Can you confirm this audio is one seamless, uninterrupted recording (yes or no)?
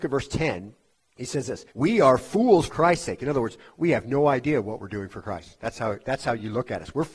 no